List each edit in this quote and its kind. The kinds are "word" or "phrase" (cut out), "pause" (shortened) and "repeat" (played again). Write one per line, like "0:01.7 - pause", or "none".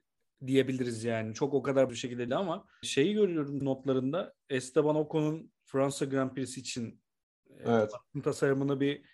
0:01.9 - word
0:02.3 - word
0:02.8 - word
0:03.6 - word